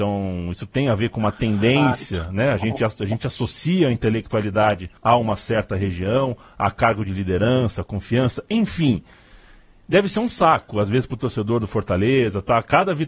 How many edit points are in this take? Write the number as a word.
one